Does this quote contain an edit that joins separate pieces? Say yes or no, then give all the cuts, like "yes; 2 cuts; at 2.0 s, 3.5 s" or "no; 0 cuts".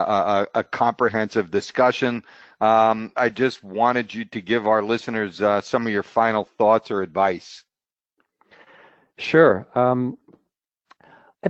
no; 0 cuts